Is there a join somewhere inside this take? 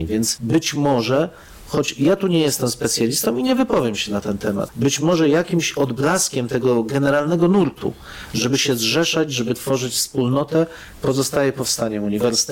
no; 0 cuts

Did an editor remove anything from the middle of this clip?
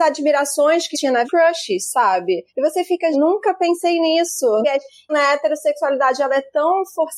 yes; 6 cuts; at 0.9 s, 1.2 s, 2.5 s, 3.1 s, 4.6 s, 5.1 s

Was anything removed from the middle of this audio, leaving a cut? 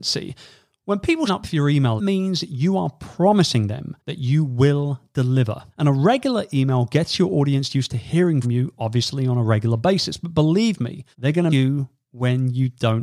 yes; 7 cuts; at 1.3 s, 2.0 s, 4.0 s, 5.7 s, 8.4 s, 11.1 s, 11.5 s

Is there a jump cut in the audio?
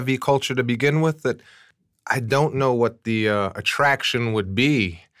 no; 0 cuts

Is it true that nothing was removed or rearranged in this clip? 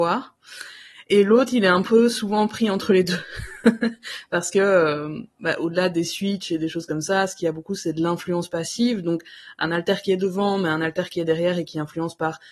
no; 1 cut; at 5.3 s

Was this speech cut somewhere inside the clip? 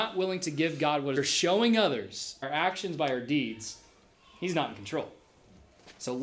yes; 2 cuts; at 1.2 s, 2.4 s

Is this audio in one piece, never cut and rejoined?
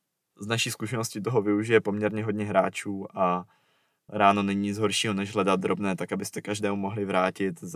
yes; 0 cuts

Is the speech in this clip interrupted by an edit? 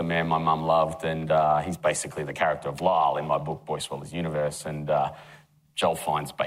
no; 0 cuts

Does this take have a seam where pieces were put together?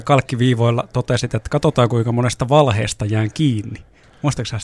no; 0 cuts

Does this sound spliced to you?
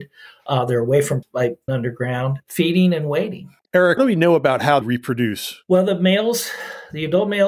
yes; 4 cuts; at 1.2 s, 1.7 s, 4.0 s, 4.8 s

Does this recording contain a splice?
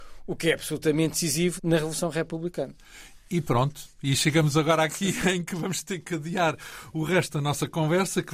yes; 1 cut; at 1.6 s

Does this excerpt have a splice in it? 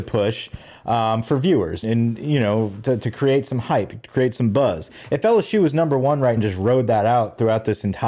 yes; 2 cuts; at 1.8 s, 6.4 s

